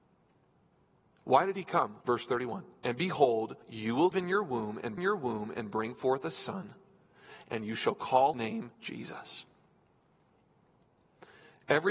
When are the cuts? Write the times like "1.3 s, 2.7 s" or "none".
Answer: 2.0 s, 2.7 s, 3.6 s, 4.1 s, 5.0 s, 8.3 s, 8.7 s